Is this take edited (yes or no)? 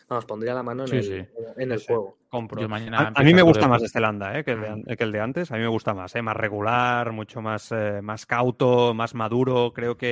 no